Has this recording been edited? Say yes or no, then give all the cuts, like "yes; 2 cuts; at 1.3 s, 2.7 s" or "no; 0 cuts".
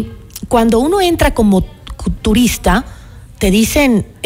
no; 0 cuts